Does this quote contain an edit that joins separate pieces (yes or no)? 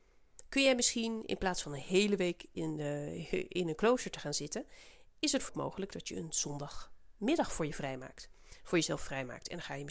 yes